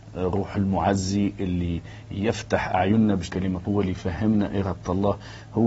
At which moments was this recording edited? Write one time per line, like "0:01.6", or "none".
0:03.3
0:03.6